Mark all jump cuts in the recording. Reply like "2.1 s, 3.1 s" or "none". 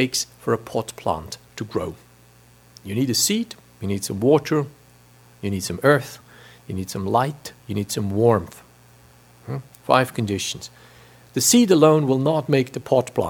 7.6 s